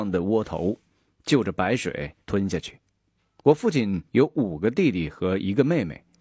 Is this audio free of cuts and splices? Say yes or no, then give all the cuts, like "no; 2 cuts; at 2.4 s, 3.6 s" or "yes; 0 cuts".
no; 3 cuts; at 2.2 s, 3.2 s, 4.1 s